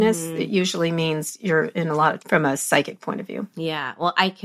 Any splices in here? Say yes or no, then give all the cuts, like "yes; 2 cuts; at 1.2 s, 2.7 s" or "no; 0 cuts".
yes; 1 cut; at 2.2 s